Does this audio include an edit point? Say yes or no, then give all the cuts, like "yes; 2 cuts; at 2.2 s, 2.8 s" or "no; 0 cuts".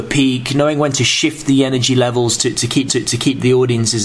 yes; 1 cut; at 2.9 s